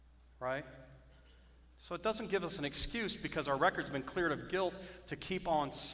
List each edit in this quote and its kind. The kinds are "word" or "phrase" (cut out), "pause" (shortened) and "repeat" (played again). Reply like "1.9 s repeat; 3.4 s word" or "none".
none